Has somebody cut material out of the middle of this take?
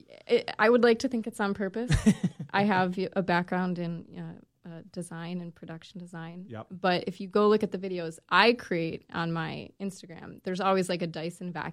no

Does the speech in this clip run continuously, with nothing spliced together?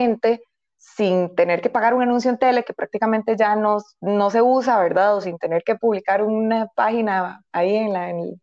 yes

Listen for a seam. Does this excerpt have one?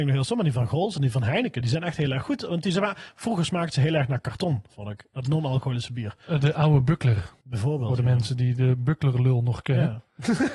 yes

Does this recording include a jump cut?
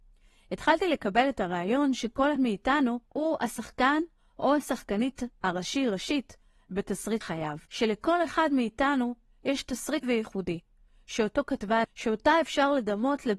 yes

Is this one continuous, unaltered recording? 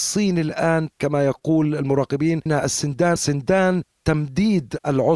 no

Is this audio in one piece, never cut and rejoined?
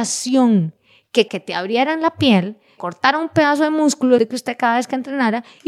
no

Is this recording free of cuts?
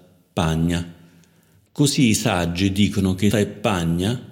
no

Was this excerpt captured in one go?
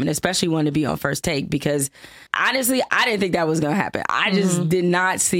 no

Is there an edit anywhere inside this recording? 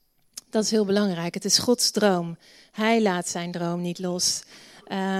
no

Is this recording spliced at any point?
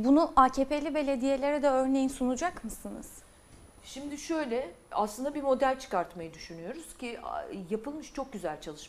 no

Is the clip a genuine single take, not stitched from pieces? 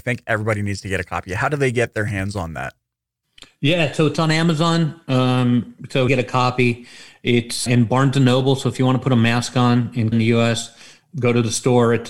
no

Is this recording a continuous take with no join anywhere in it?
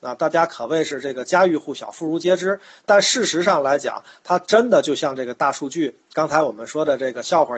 yes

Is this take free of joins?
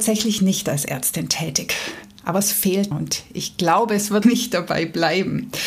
no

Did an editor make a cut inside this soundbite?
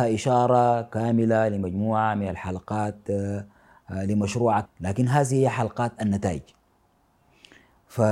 yes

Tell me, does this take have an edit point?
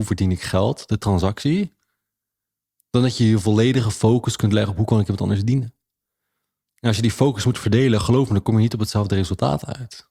no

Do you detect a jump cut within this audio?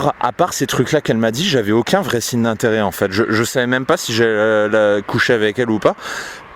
no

